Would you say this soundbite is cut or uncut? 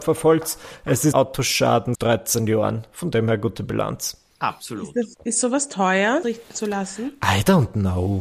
cut